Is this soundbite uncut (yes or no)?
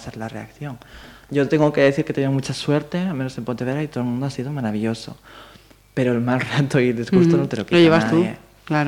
yes